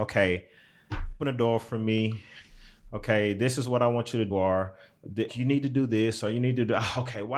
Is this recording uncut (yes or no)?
no